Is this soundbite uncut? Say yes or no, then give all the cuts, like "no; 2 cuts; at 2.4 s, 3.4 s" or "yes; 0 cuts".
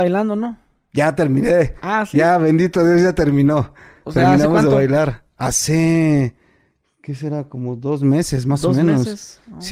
yes; 0 cuts